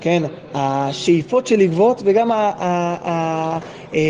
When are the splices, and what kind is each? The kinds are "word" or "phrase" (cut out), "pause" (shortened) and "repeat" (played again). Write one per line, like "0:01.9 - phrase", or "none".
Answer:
none

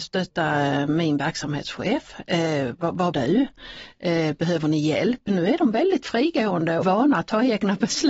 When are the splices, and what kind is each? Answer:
0:03.1 - word
0:06.8 - phrase

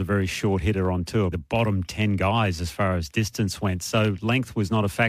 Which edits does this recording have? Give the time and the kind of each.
0:01.3 - word

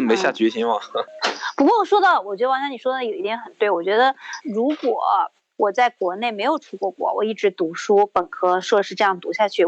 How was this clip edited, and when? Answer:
none

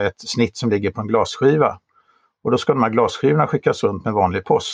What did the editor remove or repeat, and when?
none

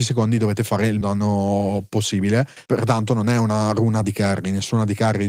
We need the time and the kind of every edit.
0:01.0 - word
0:02.6 - pause
0:04.0 - word

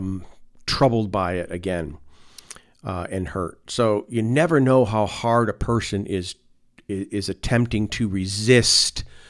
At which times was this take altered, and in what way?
none

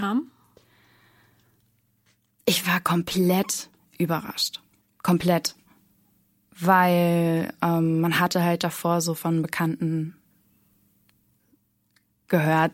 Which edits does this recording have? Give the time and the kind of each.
0:04.8 - pause

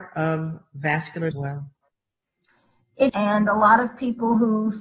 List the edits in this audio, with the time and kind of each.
0:01.3 - phrase
0:03.1 - word

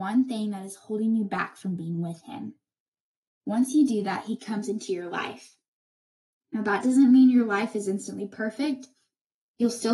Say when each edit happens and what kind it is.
none

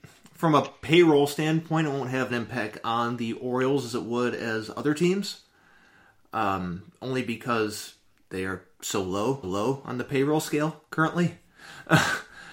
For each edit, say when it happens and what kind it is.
0:02.3 - phrase
0:08.1 - pause
0:09.4 - repeat

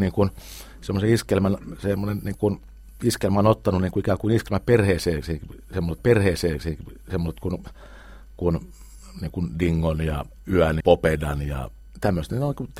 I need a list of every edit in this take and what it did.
0:06.0 - repeat
0:10.8 - word

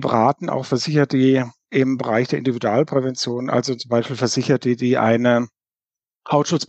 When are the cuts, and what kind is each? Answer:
none

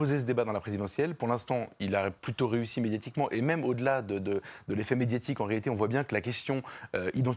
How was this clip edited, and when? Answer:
none

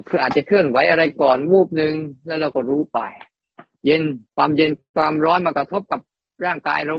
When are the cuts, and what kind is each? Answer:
0:04.3 - pause

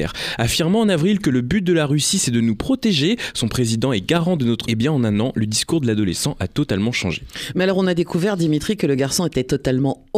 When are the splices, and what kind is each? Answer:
0:04.6 - word

